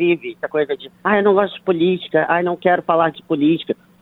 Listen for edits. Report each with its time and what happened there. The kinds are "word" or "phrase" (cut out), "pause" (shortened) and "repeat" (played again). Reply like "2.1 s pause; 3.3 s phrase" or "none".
0.9 s pause